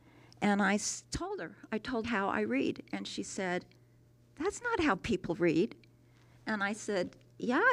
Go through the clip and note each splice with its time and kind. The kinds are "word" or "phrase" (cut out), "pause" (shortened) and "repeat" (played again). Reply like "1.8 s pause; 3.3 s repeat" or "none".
2.0 s phrase